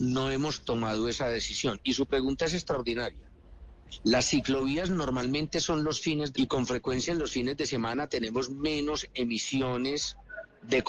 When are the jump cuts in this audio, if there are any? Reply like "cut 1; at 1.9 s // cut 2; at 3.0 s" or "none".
cut 1; at 6.3 s